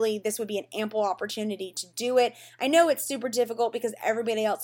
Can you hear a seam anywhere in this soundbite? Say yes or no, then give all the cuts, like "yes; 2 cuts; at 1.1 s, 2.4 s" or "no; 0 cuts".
no; 0 cuts